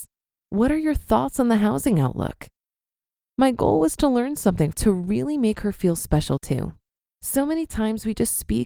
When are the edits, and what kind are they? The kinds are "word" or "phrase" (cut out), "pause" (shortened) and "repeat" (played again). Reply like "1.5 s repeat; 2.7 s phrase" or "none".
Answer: 4.7 s phrase